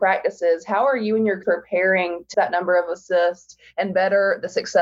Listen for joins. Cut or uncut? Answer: cut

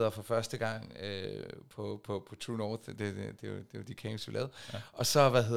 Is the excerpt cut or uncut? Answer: uncut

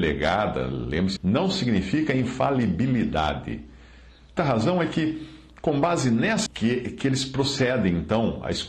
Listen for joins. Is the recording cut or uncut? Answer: cut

